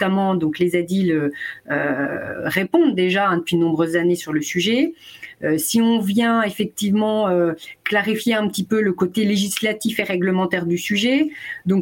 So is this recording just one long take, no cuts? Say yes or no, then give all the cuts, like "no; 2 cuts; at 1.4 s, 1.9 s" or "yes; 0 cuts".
yes; 0 cuts